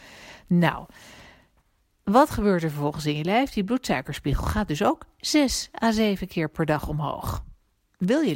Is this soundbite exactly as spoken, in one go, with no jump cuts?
yes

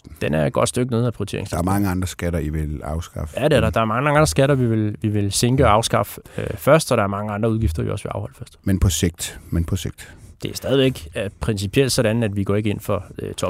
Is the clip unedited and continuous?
yes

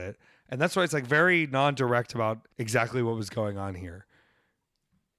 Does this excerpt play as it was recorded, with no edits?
no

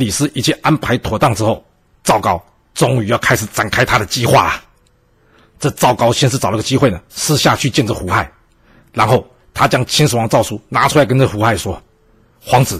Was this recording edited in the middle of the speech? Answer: no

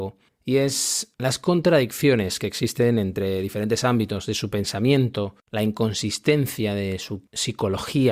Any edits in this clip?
yes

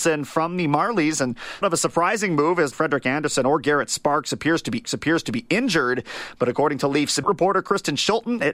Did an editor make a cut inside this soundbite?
yes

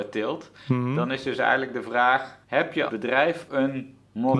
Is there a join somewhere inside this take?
yes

